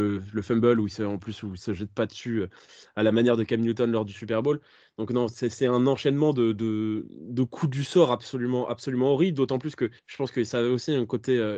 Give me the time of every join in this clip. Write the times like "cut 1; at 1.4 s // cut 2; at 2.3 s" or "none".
cut 1; at 10.0 s